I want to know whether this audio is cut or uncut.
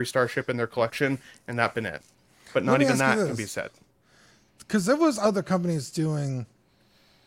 uncut